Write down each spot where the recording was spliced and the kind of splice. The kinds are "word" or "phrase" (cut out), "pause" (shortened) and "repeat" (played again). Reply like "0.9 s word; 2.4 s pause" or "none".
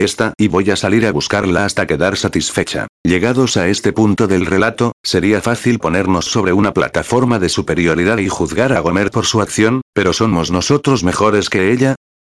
2.9 s pause